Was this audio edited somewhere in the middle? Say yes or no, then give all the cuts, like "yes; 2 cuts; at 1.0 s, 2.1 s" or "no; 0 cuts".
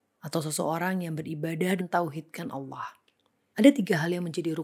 yes; 1 cut; at 1.8 s